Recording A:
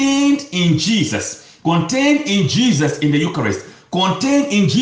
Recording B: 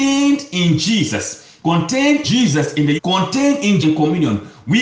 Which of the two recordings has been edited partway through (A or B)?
B